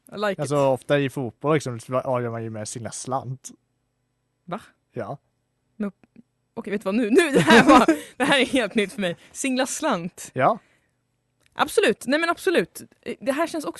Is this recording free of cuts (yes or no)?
yes